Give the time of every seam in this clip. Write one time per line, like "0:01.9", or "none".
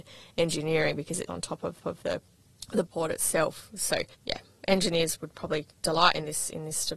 0:01.3
0:01.8
0:02.9
0:04.1
0:05.1